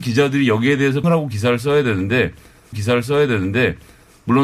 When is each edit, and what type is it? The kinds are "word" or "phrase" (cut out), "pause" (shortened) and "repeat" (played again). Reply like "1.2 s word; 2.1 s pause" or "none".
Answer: 1.0 s word; 2.7 s repeat